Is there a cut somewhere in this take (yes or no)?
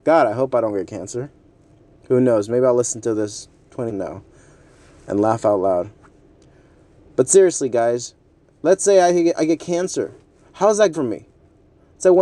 yes